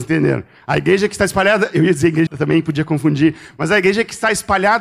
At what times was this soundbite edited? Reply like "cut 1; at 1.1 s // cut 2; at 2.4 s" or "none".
cut 1; at 2.3 s